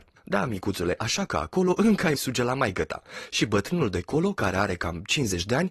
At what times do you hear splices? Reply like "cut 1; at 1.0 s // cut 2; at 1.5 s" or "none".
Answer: cut 1; at 2.1 s